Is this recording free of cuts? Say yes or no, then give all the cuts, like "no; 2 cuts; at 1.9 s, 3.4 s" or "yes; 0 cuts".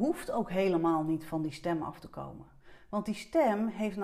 yes; 0 cuts